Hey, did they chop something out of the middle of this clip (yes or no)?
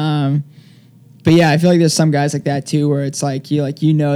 no